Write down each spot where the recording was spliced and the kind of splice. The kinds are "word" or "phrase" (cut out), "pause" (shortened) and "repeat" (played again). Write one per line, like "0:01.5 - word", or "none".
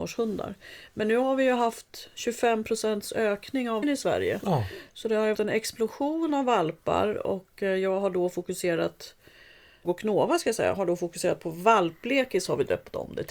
0:03.8 - word
0:05.3 - word
0:09.8 - word